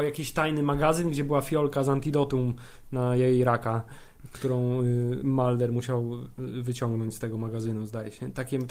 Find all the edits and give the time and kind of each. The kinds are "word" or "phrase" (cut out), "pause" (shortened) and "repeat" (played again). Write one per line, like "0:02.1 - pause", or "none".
none